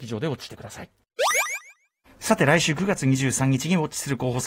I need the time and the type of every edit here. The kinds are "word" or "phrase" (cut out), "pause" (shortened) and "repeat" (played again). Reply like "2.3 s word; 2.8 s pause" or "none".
none